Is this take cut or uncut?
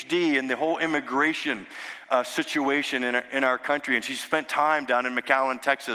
uncut